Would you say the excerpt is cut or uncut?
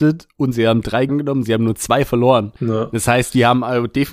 cut